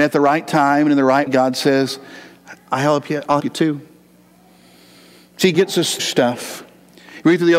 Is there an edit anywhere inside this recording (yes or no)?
yes